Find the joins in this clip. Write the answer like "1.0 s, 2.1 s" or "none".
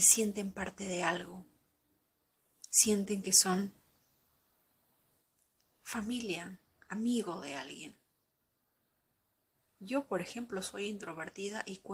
none